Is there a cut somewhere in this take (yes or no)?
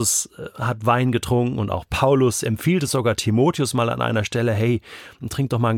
no